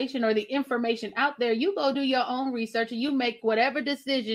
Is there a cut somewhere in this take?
no; 0 cuts

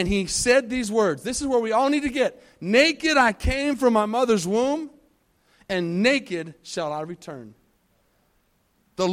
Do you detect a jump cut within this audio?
no; 0 cuts

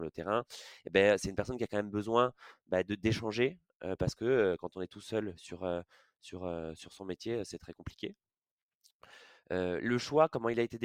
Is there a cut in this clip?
no; 0 cuts

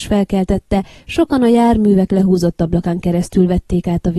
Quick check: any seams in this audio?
no; 0 cuts

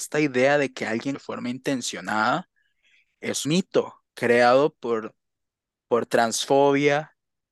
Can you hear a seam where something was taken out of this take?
yes; 3 cuts; at 1.1 s, 3.4 s, 4.1 s

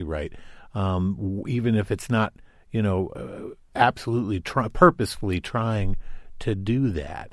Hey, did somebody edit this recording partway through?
no; 0 cuts

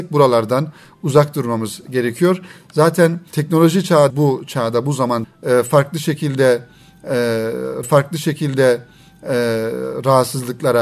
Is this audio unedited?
no; 4 cuts; at 3.3 s, 4.1 s, 5.2 s, 7.8 s

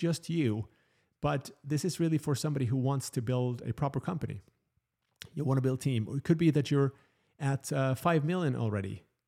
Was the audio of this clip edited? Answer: no; 0 cuts

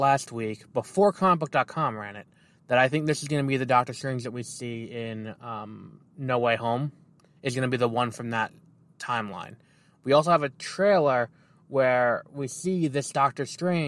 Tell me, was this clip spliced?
no; 0 cuts

